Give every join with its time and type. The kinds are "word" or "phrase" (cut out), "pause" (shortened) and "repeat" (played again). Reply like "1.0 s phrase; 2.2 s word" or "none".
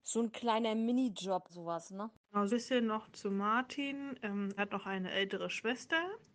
1.5 s word; 2.5 s word; 4.6 s word